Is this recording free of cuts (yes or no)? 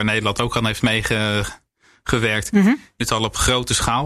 no